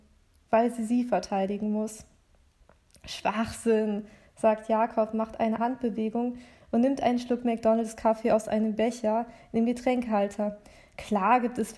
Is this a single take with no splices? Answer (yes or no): no